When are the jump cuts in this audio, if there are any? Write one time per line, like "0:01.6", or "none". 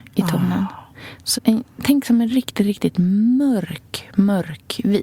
0:01.3